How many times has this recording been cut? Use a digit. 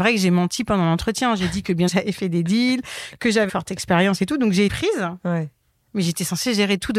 3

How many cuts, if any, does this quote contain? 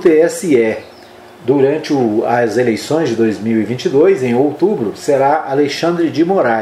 0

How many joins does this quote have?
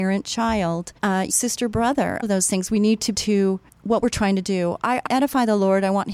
6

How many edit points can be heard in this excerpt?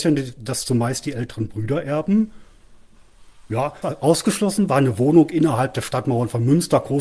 2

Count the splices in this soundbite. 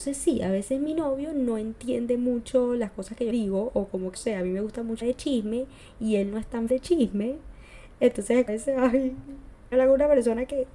6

